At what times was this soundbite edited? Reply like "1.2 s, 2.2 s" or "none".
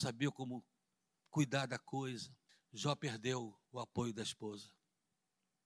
2.5 s, 3.6 s